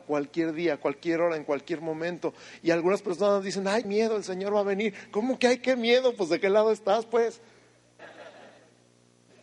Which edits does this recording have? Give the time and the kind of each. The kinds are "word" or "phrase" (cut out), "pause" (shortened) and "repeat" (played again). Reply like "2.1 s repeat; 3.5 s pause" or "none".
3.8 s word